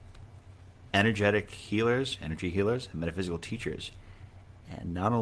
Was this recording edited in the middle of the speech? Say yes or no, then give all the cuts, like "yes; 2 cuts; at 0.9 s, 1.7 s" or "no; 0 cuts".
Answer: no; 0 cuts